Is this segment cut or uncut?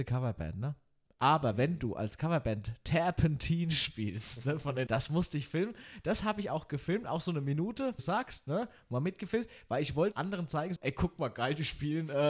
cut